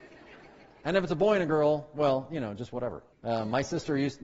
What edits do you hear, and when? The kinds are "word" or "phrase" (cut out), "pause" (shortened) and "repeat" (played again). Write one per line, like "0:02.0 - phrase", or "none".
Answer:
0:03.1 - pause